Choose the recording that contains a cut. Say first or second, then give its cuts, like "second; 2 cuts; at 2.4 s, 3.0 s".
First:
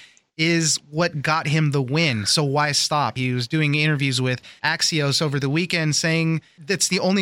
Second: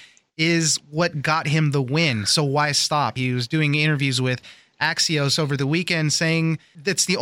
first; 1 cut; at 4.6 s